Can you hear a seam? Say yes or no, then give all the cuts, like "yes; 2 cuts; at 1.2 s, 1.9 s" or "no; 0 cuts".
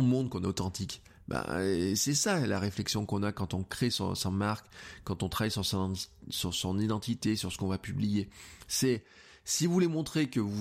no; 0 cuts